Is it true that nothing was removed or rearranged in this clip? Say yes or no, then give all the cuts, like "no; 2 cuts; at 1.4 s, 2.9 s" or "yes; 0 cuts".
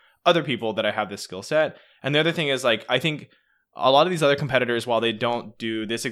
yes; 0 cuts